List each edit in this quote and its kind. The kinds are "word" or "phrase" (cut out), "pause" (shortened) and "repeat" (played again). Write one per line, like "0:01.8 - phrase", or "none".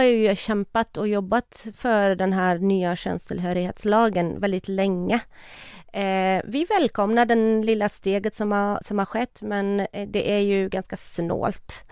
none